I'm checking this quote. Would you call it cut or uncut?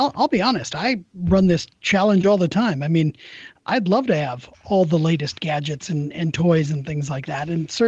uncut